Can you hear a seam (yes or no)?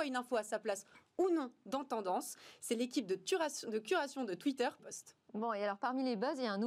yes